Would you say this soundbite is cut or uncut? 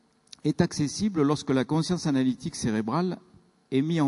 uncut